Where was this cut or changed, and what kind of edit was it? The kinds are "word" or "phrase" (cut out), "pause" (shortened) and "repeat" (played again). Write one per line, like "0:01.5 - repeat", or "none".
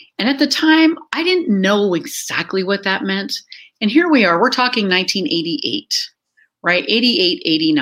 none